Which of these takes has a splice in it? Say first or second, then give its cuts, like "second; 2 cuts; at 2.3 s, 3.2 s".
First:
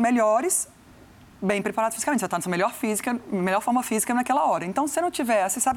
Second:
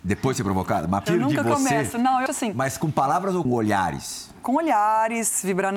second; 3 cuts; at 1.1 s, 2.3 s, 3.4 s